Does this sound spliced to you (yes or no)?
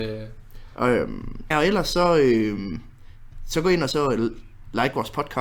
yes